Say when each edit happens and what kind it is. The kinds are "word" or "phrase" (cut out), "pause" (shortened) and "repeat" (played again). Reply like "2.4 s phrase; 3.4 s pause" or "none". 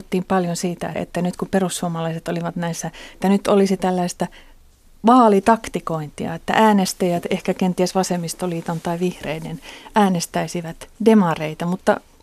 0.9 s word; 3.1 s phrase

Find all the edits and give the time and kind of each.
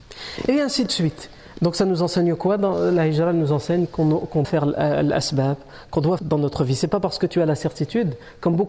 4.4 s word; 6.2 s phrase

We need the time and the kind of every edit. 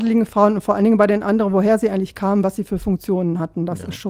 none

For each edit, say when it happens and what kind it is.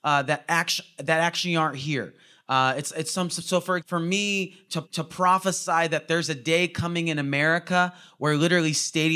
3.8 s word; 4.8 s repeat

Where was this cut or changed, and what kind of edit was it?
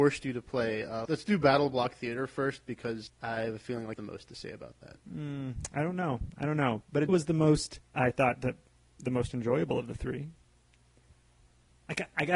1.0 s word; 3.1 s word; 4.0 s phrase; 5.0 s pause; 7.1 s word; 7.9 s pause

